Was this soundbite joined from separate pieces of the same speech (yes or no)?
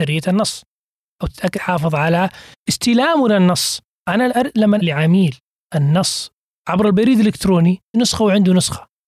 yes